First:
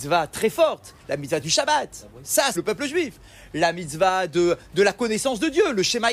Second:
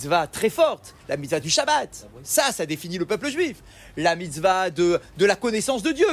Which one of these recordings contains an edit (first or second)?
first